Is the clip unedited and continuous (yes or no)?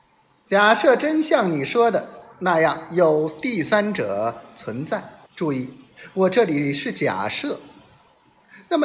no